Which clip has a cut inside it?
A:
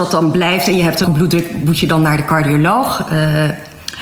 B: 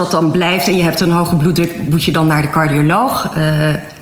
A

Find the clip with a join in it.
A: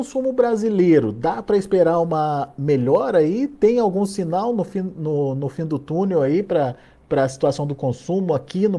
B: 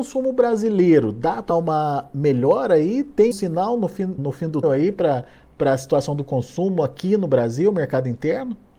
B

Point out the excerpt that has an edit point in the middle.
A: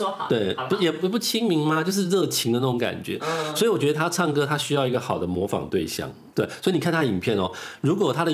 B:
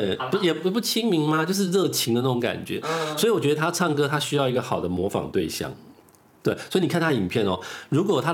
A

